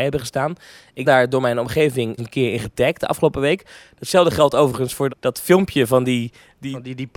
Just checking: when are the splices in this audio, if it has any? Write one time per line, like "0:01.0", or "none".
0:01.0
0:02.2
0:05.1